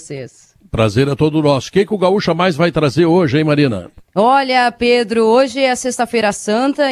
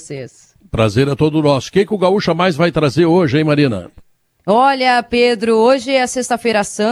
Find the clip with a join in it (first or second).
first